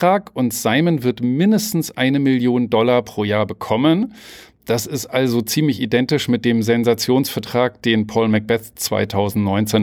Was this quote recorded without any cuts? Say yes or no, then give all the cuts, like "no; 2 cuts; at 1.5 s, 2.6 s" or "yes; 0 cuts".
yes; 0 cuts